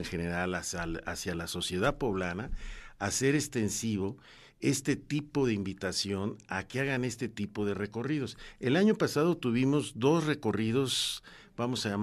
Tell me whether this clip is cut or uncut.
uncut